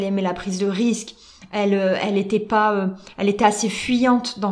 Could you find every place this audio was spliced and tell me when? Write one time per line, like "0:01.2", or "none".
none